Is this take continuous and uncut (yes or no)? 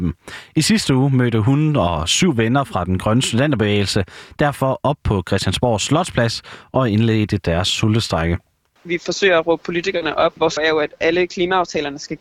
no